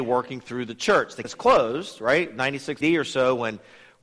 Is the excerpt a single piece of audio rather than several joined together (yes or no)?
no